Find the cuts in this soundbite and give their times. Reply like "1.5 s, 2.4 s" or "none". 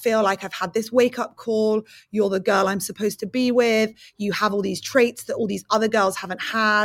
none

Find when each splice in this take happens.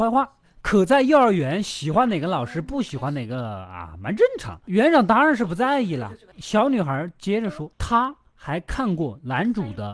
7.7 s

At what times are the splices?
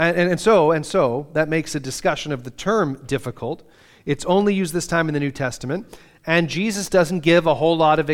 none

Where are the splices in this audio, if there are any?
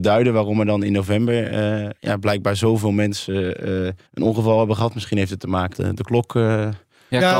2.0 s, 4.1 s, 5.7 s

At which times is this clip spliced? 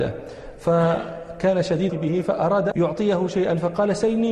1.9 s, 2.7 s

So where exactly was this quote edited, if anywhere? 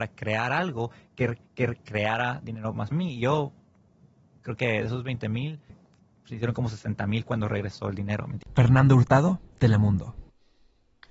1.4 s, 2.9 s, 5.7 s

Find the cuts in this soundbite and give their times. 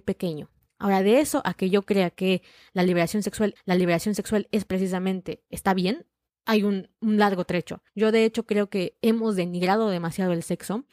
3.6 s, 7.9 s

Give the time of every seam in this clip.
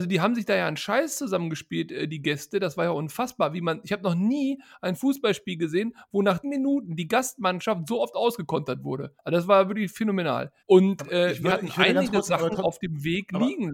6.4 s, 9.2 s, 10.6 s

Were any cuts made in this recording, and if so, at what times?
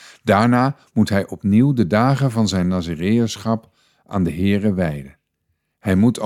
none

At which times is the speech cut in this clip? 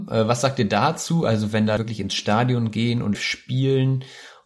1.8 s, 3.1 s

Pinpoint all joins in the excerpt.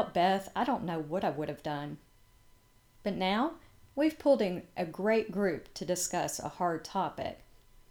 none

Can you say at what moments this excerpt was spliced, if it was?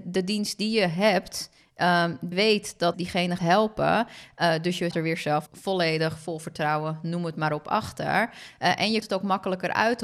2.3 s, 2.9 s, 3.4 s, 4.9 s, 5.5 s, 9.0 s

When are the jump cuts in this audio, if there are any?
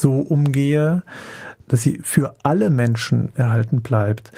none

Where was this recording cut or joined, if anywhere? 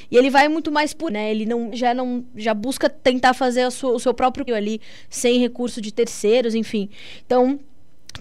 1.1 s, 1.7 s, 4.5 s

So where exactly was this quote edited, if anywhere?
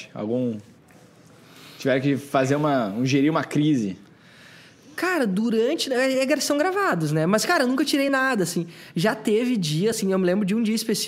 none

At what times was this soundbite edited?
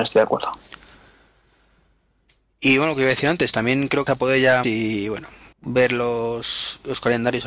4.1 s, 4.6 s, 5.5 s

